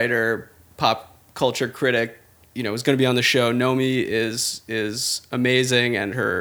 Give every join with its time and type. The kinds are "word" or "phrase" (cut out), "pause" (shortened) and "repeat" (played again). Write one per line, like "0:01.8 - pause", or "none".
0:02.4 - pause